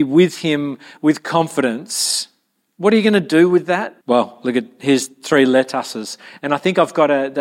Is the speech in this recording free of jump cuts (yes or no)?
no